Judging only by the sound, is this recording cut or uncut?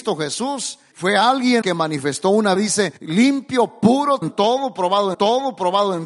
cut